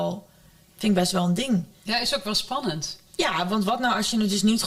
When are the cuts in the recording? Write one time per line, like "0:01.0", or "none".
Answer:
0:03.1